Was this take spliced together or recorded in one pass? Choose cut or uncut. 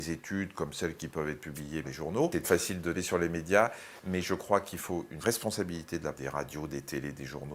cut